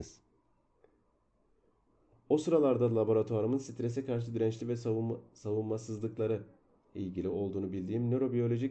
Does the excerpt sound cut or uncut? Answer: uncut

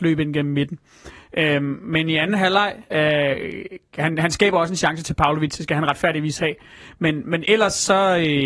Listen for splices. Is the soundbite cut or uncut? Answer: cut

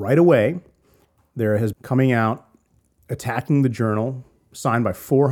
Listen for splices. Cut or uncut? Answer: cut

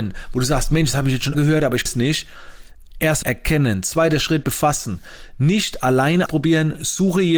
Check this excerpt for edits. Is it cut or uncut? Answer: cut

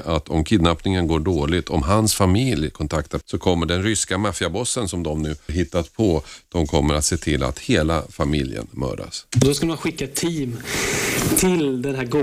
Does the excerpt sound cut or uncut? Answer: cut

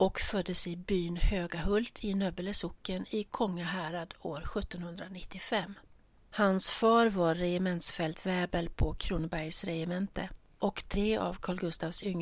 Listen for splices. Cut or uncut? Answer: uncut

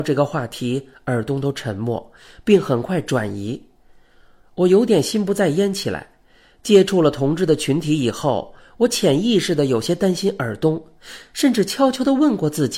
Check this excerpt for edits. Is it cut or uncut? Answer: uncut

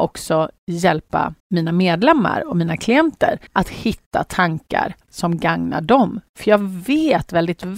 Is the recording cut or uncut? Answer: cut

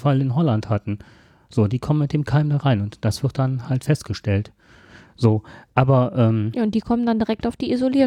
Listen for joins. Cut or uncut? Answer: uncut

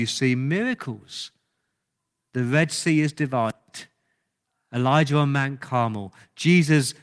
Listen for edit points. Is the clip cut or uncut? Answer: uncut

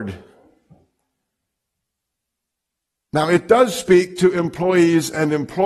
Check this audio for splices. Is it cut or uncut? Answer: uncut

